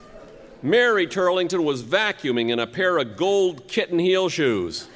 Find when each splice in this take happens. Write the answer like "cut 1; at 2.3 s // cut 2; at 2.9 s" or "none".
none